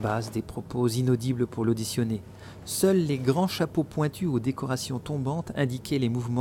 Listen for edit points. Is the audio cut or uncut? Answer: uncut